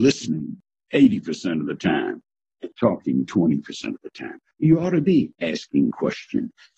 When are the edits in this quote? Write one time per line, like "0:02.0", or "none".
none